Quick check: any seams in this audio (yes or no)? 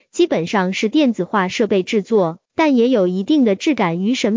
yes